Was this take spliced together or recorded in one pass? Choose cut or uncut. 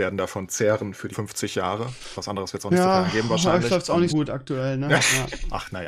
cut